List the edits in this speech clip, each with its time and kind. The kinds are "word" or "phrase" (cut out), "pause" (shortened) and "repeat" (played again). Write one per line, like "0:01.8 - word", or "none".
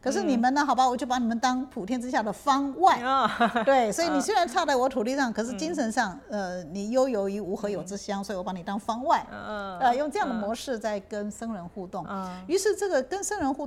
none